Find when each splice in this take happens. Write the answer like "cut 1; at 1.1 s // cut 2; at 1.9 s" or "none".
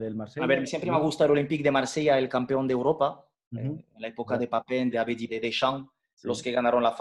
cut 1; at 4.9 s // cut 2; at 5.3 s